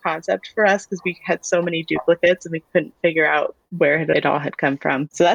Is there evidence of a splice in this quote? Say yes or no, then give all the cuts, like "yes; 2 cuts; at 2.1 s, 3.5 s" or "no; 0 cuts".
no; 0 cuts